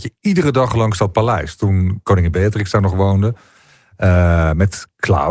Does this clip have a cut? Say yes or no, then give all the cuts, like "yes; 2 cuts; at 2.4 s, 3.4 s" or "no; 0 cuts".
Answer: no; 0 cuts